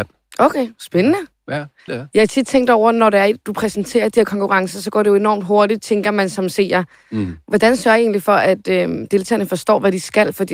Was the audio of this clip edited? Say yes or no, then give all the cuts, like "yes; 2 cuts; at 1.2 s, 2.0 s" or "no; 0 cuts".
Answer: yes; 1 cut; at 1.9 s